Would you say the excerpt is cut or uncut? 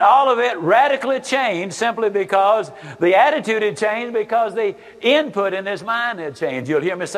uncut